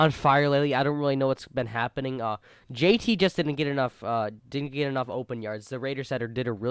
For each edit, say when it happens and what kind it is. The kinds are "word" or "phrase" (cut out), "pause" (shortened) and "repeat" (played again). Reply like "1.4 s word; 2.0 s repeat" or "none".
none